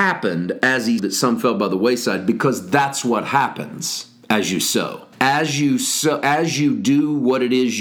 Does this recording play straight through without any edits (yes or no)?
no